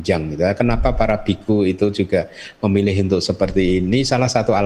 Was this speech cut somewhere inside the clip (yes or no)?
no